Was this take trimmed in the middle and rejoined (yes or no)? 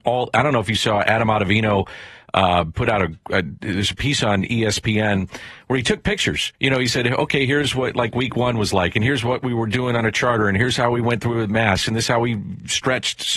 yes